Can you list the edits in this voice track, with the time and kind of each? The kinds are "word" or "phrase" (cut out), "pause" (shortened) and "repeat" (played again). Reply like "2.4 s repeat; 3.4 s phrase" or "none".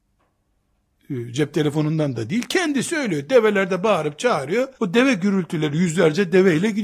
4.7 s pause